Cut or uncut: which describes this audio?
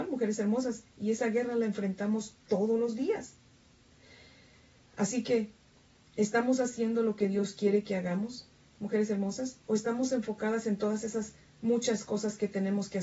uncut